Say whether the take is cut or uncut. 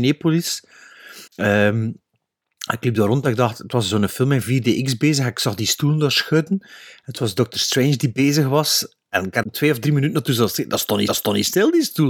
cut